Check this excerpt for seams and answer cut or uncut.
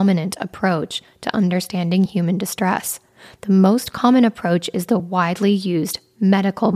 uncut